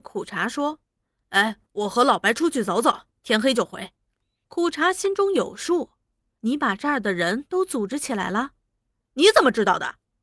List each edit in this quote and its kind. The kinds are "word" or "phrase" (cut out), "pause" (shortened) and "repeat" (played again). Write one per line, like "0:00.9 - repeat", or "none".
none